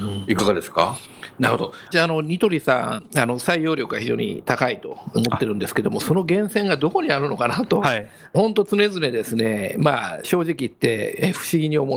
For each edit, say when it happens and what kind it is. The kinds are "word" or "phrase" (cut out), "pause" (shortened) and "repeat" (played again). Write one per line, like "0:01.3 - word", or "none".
0:01.9 - word